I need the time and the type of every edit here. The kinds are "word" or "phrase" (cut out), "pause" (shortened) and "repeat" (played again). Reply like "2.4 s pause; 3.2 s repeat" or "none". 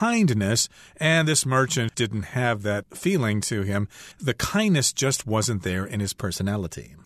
1.9 s word; 4.1 s pause